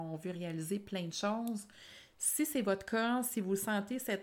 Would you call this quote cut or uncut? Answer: uncut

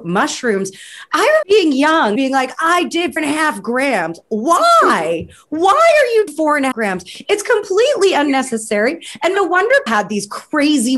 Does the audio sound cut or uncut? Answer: cut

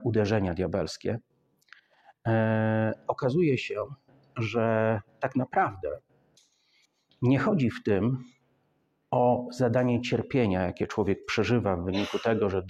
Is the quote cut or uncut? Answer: uncut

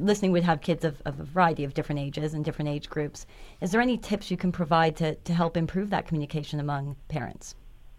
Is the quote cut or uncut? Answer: uncut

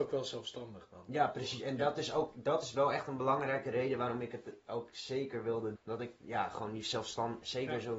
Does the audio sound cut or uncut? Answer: cut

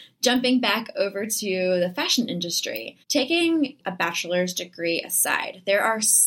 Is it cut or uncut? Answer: cut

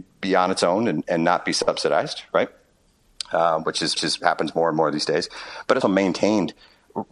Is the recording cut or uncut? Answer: cut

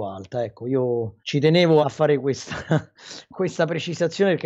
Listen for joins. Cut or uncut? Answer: cut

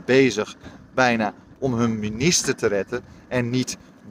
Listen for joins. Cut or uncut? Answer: uncut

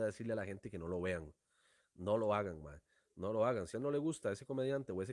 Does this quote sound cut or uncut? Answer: cut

